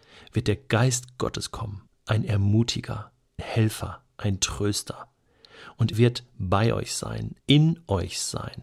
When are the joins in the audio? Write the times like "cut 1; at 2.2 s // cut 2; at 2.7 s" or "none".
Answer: cut 1; at 1.9 s // cut 2; at 3.4 s // cut 3; at 5.9 s // cut 4; at 7.4 s